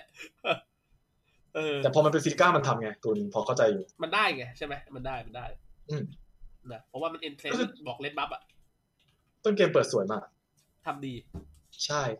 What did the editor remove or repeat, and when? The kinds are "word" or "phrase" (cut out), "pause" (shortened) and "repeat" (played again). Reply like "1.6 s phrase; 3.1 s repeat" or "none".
3.0 s pause; 3.9 s pause